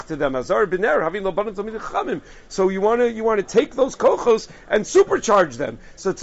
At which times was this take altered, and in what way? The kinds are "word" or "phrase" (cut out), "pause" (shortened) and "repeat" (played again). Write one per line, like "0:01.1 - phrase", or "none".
none